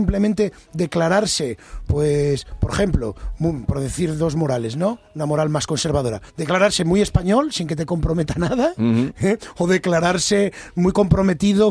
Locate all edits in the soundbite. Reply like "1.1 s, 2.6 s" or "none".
6.3 s